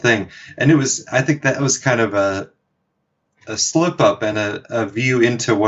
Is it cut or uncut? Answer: uncut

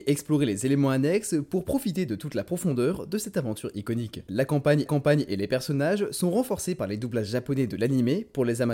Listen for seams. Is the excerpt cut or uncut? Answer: cut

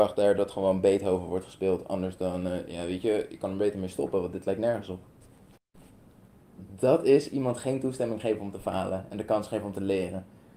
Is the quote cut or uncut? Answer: uncut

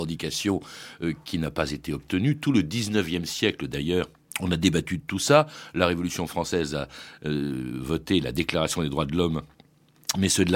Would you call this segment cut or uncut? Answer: cut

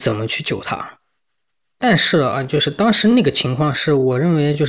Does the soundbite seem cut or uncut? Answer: uncut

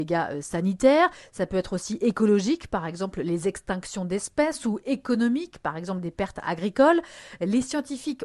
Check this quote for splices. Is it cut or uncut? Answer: uncut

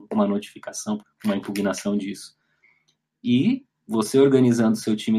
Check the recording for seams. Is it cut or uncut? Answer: cut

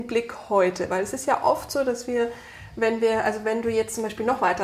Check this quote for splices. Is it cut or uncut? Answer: uncut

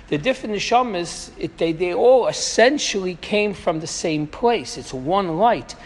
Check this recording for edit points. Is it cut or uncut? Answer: uncut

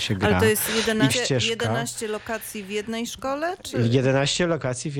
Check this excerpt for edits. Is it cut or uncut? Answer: cut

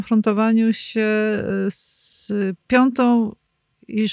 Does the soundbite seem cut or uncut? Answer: uncut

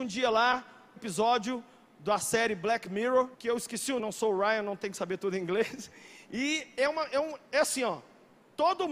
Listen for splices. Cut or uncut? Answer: cut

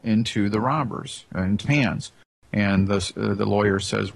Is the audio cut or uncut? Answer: cut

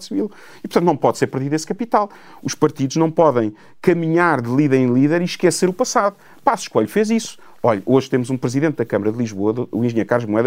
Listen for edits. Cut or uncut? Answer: uncut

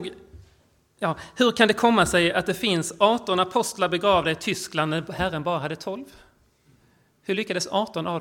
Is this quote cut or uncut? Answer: uncut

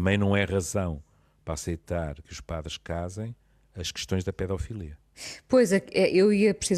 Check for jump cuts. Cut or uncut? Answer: uncut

